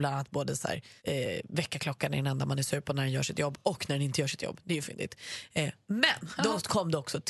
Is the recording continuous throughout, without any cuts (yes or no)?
no